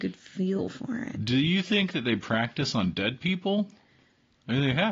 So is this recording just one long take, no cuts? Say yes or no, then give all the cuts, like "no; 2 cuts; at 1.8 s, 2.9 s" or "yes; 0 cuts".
yes; 0 cuts